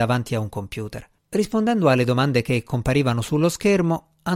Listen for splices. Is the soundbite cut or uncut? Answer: cut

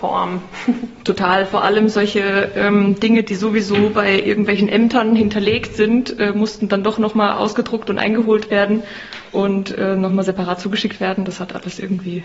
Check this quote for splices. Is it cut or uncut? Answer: uncut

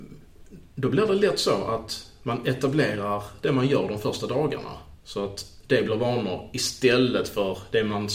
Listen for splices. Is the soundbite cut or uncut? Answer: cut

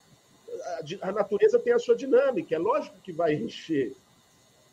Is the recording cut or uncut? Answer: uncut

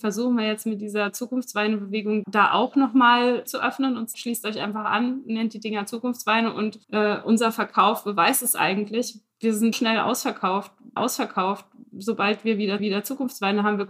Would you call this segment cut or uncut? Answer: cut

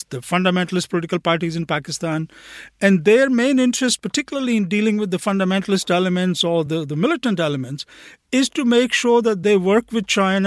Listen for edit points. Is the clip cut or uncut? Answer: uncut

